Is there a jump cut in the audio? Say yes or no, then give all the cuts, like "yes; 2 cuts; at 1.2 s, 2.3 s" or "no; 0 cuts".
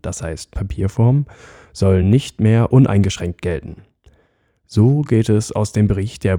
no; 0 cuts